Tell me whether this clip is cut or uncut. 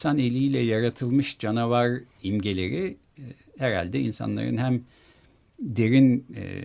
uncut